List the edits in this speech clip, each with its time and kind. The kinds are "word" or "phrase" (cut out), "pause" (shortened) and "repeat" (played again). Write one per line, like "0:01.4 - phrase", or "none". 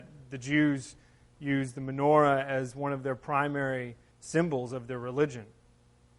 0:04.1 - word